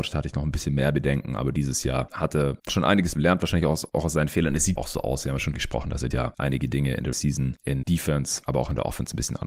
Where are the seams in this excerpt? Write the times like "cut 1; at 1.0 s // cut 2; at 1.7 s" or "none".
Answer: cut 1; at 2.7 s // cut 2; at 3.1 s // cut 3; at 4.8 s // cut 4; at 5.5 s // cut 5; at 6.1 s // cut 6; at 7.1 s // cut 7; at 7.8 s